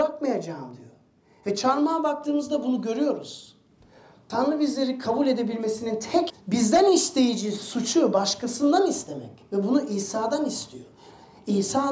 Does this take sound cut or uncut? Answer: cut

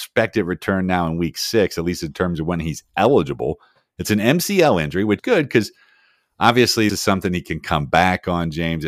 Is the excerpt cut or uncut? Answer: cut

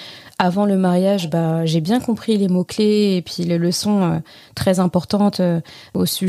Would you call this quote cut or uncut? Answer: uncut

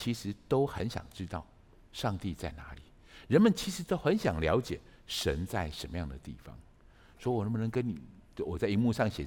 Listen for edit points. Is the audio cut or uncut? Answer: uncut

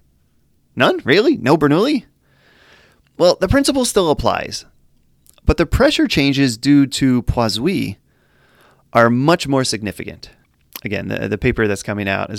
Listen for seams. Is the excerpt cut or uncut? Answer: uncut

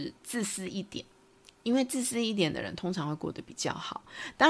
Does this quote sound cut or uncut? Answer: uncut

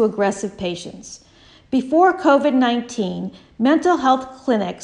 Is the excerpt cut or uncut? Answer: uncut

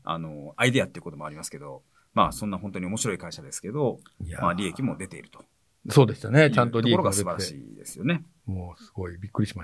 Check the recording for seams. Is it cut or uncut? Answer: uncut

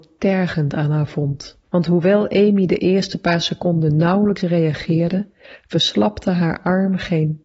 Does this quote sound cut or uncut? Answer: cut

